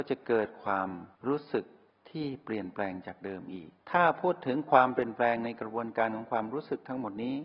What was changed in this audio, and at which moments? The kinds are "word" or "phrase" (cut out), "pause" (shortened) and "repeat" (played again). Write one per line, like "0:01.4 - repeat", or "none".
0:01.1 - pause
0:03.8 - pause